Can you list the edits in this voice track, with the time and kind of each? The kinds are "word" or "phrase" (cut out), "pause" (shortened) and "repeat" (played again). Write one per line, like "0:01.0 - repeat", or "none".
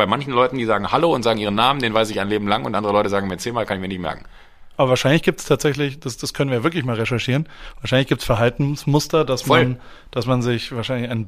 none